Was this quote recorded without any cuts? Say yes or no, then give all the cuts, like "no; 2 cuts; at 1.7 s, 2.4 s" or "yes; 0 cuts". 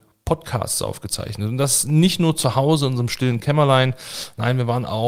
yes; 0 cuts